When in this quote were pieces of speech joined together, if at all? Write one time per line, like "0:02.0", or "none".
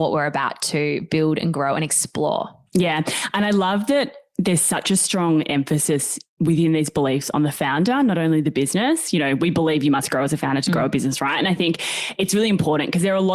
none